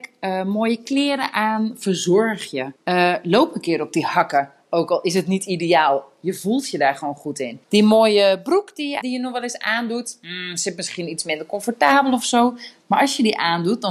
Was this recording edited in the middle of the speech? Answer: yes; 3 cuts; at 2.8 s, 7.6 s, 9.0 s

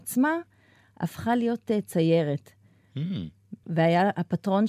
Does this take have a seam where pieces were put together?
no; 0 cuts

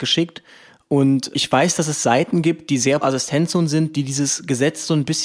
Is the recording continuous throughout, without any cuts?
no; 2 cuts; at 1.3 s, 3.0 s

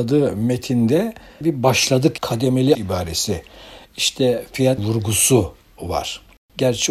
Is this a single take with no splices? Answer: no; 4 cuts; at 1.4 s, 2.2 s, 2.7 s, 4.8 s

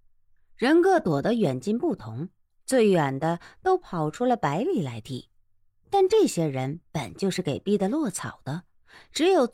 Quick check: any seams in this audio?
no; 0 cuts

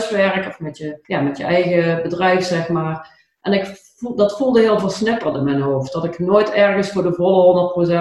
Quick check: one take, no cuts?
no; 1 cut; at 1.0 s

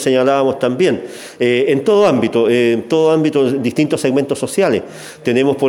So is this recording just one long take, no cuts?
yes; 0 cuts

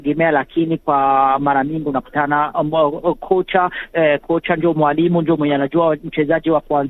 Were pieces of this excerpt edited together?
no; 0 cuts

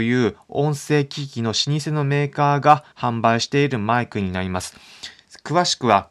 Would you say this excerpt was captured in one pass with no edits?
no; 1 cut; at 2.9 s

